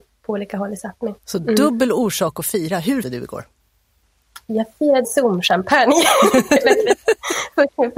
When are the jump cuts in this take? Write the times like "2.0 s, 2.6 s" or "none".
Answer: 1.2 s, 3.0 s, 4.4 s, 5.0 s